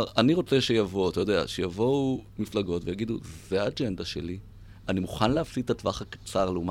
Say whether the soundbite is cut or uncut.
uncut